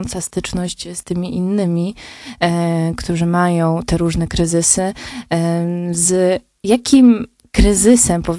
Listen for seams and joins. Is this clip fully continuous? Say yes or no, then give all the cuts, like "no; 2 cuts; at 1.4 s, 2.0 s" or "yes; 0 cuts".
yes; 0 cuts